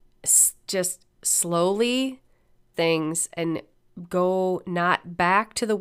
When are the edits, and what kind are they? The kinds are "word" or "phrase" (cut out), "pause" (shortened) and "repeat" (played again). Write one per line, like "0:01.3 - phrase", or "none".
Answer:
0:02.7 - word